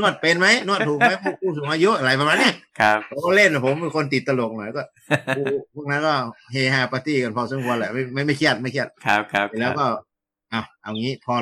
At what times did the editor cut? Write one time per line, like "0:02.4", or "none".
none